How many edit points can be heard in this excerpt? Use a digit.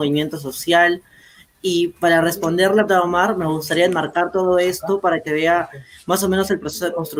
2